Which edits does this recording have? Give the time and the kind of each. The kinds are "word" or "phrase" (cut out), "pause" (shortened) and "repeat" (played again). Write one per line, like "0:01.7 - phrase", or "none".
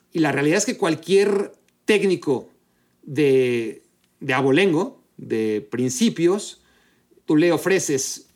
none